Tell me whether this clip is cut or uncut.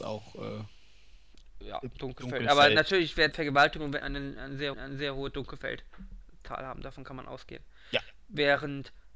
cut